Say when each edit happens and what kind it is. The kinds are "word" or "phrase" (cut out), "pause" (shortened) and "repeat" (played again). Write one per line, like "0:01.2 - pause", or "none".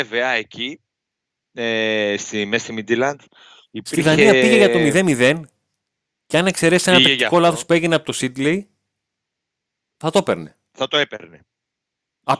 none